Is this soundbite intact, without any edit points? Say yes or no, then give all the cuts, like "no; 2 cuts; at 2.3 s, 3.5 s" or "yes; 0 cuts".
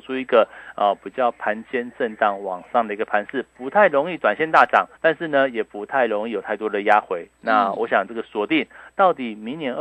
no; 1 cut; at 5.0 s